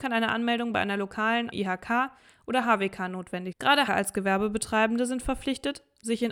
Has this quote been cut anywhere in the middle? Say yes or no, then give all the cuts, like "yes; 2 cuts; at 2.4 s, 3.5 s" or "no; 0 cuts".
yes; 3 cuts; at 1.5 s, 3.5 s, 3.9 s